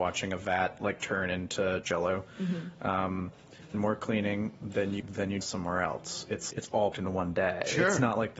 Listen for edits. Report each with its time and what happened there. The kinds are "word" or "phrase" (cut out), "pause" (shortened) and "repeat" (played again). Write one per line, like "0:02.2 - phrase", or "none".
0:01.8 - word
0:03.7 - word
0:05.0 - word
0:05.4 - word
0:06.5 - word
0:06.9 - word